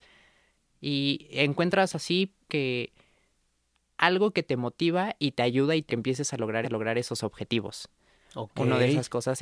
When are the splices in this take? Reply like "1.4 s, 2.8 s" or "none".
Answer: 2.5 s, 5.9 s, 6.6 s